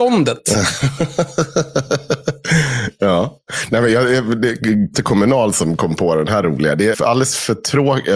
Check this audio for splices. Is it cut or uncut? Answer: cut